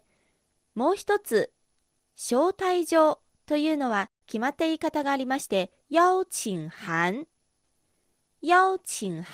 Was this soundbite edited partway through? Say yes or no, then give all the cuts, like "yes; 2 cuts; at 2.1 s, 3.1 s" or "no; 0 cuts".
yes; 1 cut; at 5.8 s